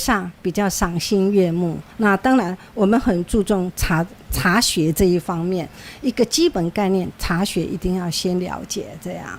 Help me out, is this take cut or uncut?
cut